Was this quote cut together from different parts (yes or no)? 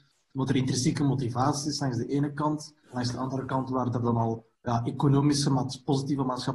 yes